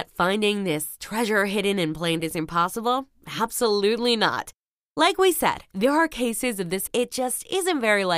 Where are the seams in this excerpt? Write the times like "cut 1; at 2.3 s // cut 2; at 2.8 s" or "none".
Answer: cut 1; at 2.2 s // cut 2; at 6.9 s